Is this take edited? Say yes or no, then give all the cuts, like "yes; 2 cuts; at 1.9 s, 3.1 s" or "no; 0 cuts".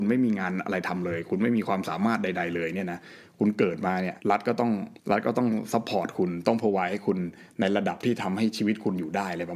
yes; 2 cuts; at 4.2 s, 5.0 s